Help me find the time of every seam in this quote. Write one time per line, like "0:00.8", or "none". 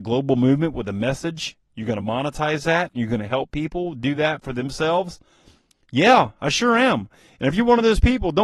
none